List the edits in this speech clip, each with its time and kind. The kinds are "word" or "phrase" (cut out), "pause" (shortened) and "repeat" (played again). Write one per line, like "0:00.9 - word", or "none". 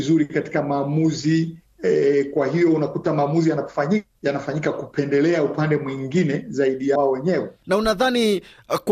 0:07.0 - word